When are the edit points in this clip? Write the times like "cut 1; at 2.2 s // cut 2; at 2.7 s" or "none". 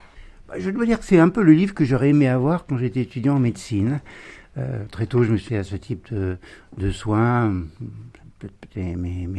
cut 1; at 4.9 s // cut 2; at 5.5 s